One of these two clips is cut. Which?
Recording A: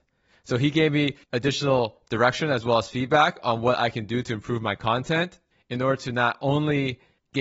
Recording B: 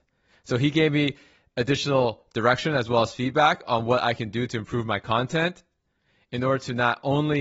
A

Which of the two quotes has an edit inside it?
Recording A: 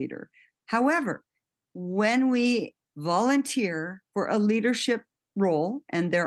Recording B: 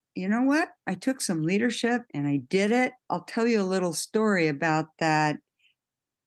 B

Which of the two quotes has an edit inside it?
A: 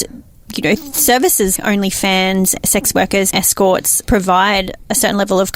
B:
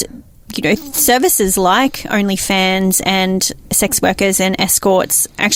A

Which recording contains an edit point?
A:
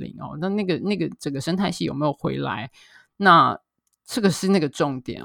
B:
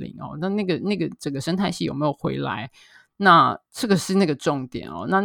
B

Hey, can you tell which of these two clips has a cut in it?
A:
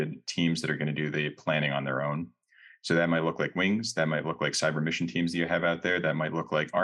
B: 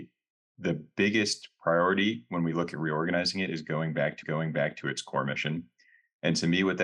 B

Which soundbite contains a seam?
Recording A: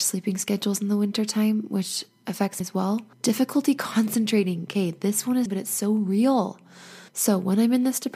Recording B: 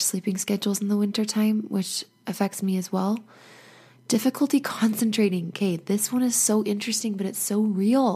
A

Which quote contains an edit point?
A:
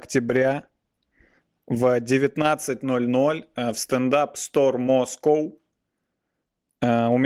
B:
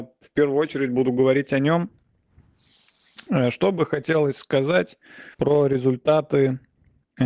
B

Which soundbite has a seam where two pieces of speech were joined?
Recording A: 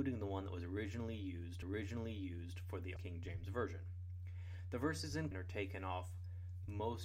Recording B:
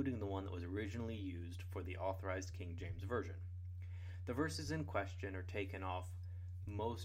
A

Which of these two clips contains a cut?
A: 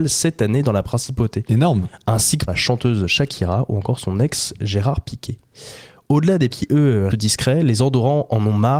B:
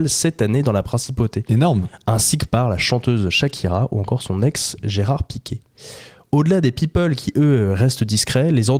A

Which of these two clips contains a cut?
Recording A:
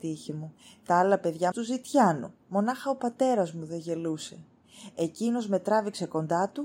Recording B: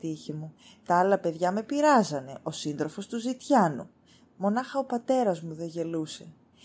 A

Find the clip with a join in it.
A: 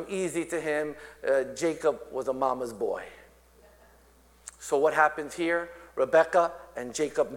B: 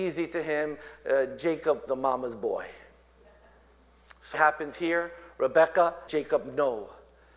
B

